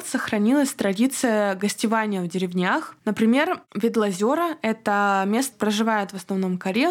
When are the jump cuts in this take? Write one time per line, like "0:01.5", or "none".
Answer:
0:05.5